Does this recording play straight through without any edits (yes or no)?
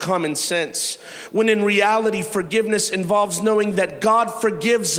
yes